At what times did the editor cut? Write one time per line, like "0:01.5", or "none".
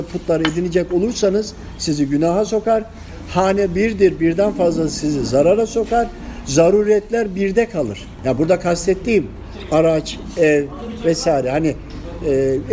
none